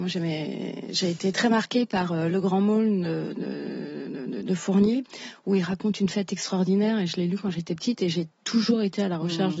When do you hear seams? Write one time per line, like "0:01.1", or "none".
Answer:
none